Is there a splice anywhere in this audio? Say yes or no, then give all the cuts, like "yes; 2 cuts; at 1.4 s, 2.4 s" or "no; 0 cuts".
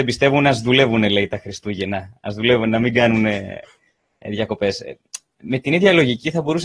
no; 0 cuts